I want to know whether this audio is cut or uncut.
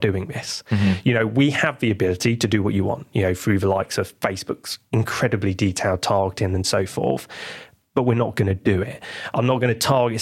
uncut